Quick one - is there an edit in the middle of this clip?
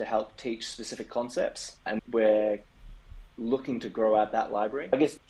no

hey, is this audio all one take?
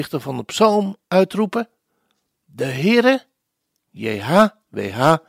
yes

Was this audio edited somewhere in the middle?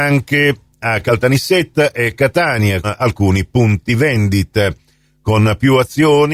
yes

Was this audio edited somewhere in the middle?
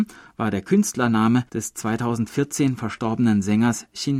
yes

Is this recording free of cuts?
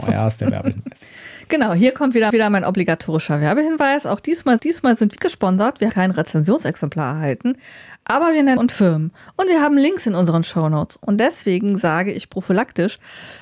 no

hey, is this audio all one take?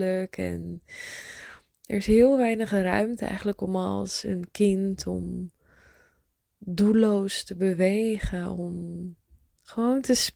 yes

